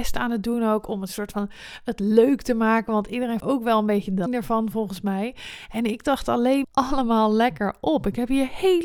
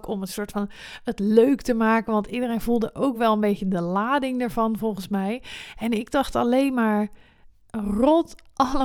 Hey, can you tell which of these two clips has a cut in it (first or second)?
first